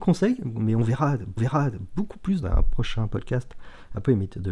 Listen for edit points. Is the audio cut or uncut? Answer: cut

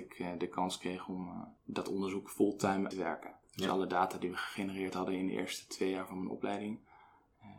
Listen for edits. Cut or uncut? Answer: cut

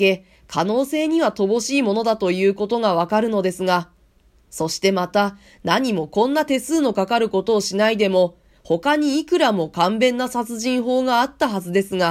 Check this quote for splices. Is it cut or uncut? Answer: uncut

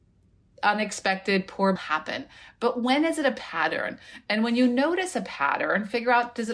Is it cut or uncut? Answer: cut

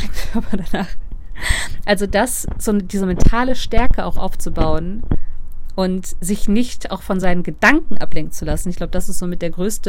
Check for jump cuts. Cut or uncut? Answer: uncut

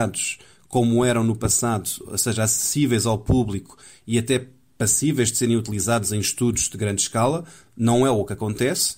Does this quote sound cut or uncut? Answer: uncut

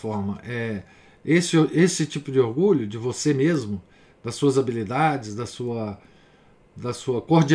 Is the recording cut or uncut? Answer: uncut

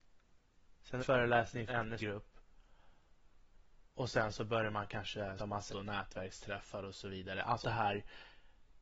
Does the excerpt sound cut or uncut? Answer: cut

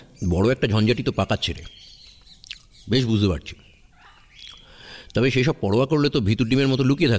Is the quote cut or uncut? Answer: uncut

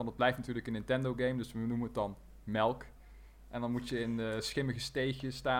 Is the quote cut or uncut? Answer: uncut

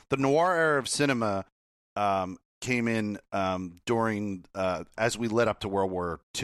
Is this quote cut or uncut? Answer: uncut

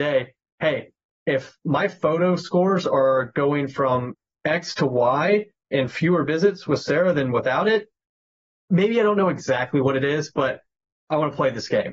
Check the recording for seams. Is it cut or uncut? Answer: uncut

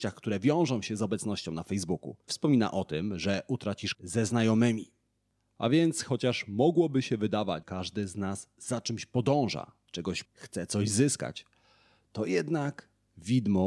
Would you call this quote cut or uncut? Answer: cut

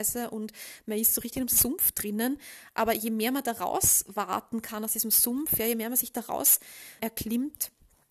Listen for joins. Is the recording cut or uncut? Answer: cut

